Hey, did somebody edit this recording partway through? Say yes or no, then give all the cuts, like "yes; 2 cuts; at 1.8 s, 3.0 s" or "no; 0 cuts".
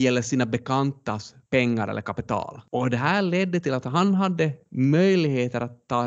no; 0 cuts